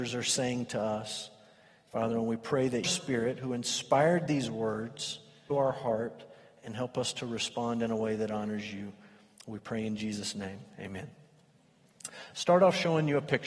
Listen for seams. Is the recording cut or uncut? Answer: cut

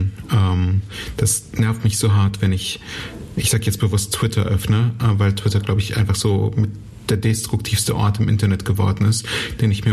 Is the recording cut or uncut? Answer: uncut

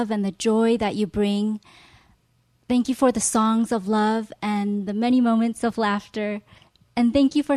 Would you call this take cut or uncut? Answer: uncut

